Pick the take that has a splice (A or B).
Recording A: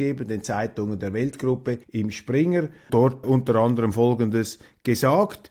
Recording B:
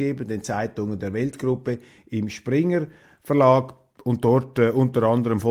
A